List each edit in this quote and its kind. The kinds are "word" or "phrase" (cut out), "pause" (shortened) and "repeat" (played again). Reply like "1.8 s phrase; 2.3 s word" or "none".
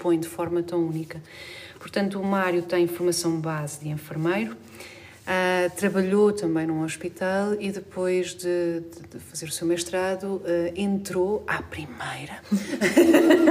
none